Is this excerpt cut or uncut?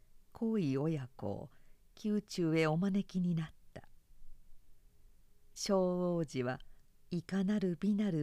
uncut